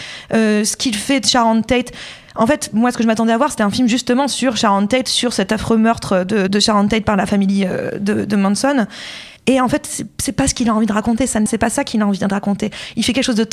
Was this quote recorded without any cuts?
no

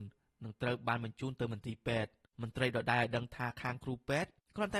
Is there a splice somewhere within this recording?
no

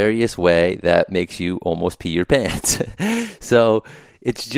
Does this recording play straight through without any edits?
yes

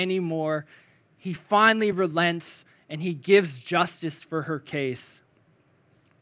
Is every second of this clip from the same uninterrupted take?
yes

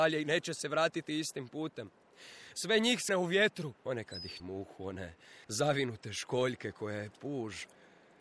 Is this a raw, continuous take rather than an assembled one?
no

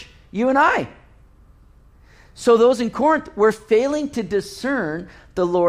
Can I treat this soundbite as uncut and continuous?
yes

